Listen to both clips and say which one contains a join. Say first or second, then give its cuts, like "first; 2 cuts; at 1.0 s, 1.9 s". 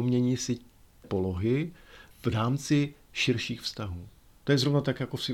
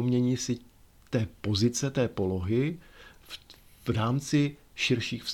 first; 2 cuts; at 1.0 s, 2.1 s